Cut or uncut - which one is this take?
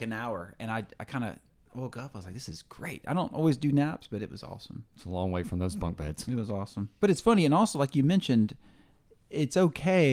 uncut